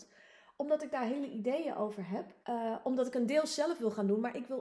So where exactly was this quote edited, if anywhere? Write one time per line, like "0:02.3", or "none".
0:02.4